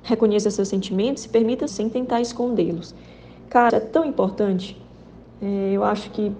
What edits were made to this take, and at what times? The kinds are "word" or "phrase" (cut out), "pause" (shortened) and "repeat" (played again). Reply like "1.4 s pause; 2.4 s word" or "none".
1.2 s word; 1.7 s word; 3.7 s word